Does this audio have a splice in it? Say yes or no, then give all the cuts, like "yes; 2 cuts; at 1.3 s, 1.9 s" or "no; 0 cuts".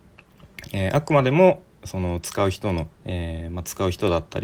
yes; 1 cut; at 2.9 s